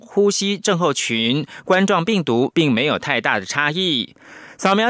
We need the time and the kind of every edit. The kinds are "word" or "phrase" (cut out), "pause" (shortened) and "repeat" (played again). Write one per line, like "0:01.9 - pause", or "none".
0:02.5 - word